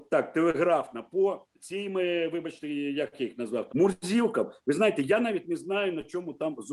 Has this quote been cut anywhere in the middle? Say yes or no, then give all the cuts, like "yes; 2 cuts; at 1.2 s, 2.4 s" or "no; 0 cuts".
yes; 2 cuts; at 1.5 s, 3.7 s